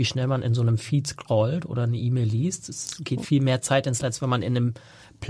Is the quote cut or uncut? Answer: cut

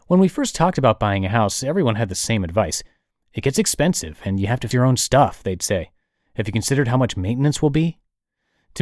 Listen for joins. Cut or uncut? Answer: cut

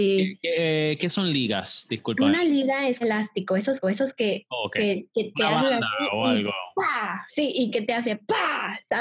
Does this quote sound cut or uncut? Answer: cut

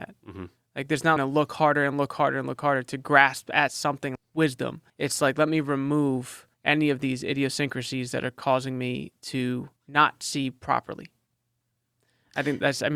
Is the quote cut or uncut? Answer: cut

